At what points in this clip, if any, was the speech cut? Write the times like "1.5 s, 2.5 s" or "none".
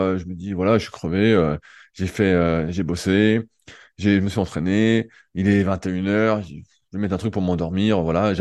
none